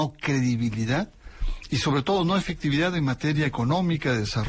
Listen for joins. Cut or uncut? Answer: uncut